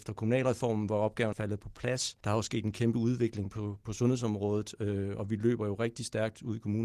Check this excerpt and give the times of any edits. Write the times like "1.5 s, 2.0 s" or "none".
1.3 s, 2.2 s